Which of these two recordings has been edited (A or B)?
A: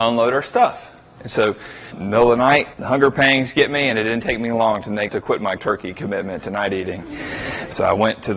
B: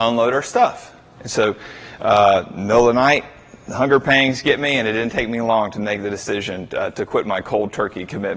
A